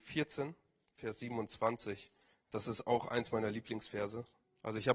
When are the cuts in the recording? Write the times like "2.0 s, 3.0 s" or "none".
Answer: 2.3 s